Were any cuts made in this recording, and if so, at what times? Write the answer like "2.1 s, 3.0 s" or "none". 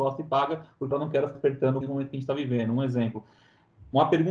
0.9 s, 1.3 s, 1.8 s